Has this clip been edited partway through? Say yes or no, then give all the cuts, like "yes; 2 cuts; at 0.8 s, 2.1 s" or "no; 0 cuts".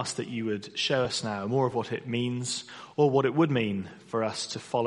no; 0 cuts